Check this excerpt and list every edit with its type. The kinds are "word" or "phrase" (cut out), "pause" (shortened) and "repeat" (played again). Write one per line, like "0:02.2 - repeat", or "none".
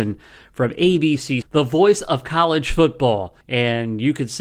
0:01.4 - word
0:03.4 - pause